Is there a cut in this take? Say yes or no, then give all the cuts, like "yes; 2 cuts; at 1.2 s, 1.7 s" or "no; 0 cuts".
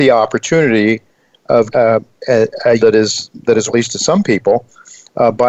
yes; 3 cuts; at 1.7 s, 2.8 s, 3.7 s